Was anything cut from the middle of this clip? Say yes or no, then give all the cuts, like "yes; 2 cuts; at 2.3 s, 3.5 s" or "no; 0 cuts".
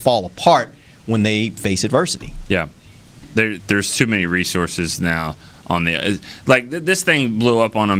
yes; 1 cut; at 3.6 s